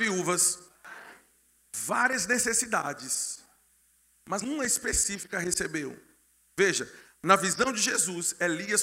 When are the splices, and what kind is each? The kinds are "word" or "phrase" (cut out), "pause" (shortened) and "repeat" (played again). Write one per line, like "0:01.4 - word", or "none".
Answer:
0:04.4 - word

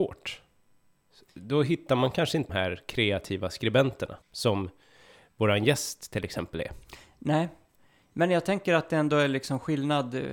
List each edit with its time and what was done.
0:02.5 - word
0:04.2 - pause

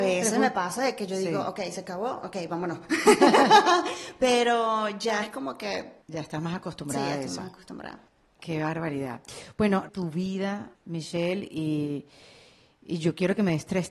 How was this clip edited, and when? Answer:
0:06.0 - pause
0:08.1 - pause
0:09.9 - phrase
0:10.8 - pause

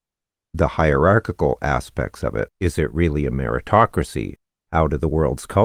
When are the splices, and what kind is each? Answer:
0:02.5 - pause
0:04.6 - pause

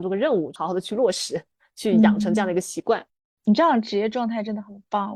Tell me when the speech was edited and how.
none

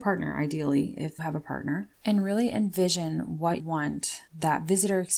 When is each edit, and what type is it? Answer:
0:01.2 - word
0:03.6 - word
0:04.3 - pause

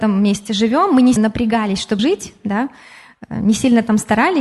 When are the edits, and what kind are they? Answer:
0:01.2 - word
0:02.0 - word

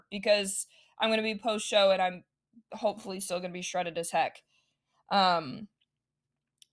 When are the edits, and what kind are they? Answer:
none

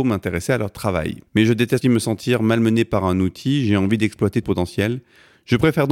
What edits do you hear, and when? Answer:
0:01.3 - pause
0:01.8 - word
0:04.4 - phrase

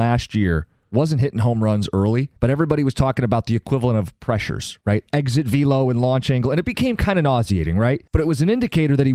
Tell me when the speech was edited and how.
0:02.4 - pause
0:08.1 - pause

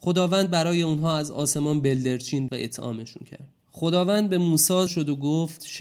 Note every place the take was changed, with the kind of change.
0:02.5 - word
0:03.6 - pause
0:04.9 - word

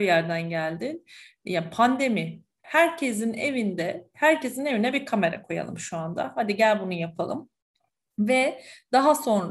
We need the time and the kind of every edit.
none

